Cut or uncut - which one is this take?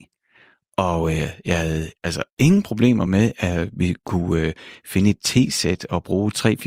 uncut